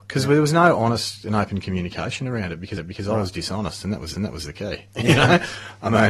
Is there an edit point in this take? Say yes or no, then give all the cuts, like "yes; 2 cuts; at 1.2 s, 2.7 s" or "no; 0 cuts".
yes; 2 cuts; at 2.8 s, 4.1 s